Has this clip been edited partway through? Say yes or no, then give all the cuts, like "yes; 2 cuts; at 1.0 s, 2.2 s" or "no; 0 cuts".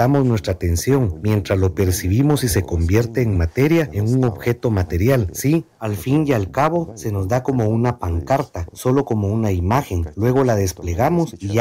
no; 0 cuts